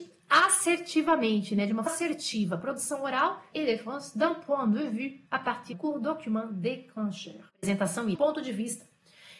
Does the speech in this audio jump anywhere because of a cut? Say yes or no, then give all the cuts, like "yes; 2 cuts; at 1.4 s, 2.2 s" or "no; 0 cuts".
yes; 6 cuts; at 1.9 s, 3.5 s, 5.3 s, 5.7 s, 7.5 s, 8.1 s